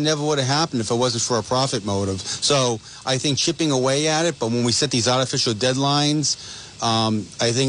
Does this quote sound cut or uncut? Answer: uncut